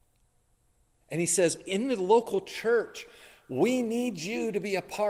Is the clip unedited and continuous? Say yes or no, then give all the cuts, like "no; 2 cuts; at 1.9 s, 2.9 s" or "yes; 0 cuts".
yes; 0 cuts